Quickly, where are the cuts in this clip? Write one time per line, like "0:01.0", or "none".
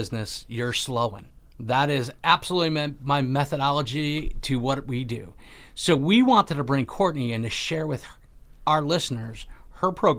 none